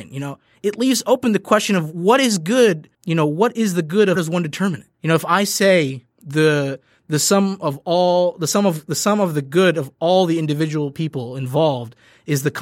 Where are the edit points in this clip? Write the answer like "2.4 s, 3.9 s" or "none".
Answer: 2.9 s, 4.2 s, 4.9 s, 6.1 s